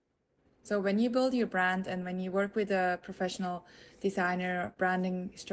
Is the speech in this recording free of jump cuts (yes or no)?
yes